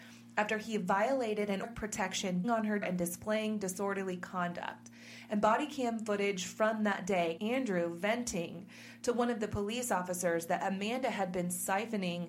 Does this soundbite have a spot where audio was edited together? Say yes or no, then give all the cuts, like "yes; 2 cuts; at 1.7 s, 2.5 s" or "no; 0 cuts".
yes; 4 cuts; at 1.6 s, 2.4 s, 2.8 s, 7.4 s